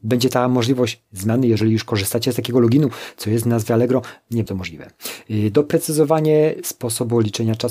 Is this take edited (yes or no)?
yes